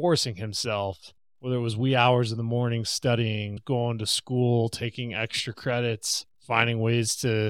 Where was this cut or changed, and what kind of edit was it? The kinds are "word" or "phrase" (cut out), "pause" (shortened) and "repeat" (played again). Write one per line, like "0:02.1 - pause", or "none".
0:01.2 - pause
0:06.3 - pause